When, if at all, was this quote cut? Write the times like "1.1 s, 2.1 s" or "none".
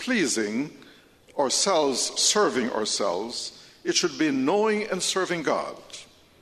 2.2 s